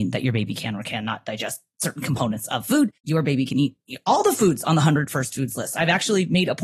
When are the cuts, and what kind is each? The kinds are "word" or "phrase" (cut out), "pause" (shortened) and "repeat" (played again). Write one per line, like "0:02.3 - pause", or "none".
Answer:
0:03.0 - pause